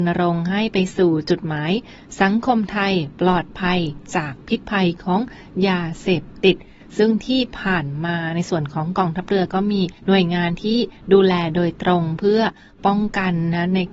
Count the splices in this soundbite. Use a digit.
1